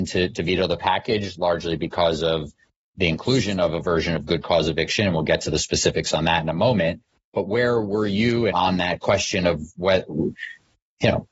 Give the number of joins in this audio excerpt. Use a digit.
1